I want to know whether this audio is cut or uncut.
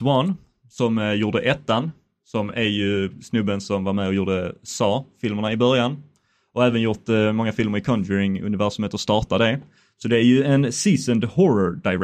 uncut